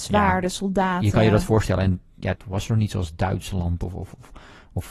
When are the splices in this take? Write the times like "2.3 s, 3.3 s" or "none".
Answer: 2.3 s, 2.9 s